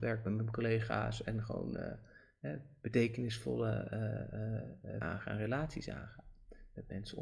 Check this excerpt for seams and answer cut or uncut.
cut